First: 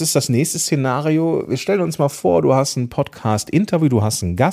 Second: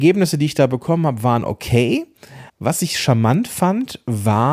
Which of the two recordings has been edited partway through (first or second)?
second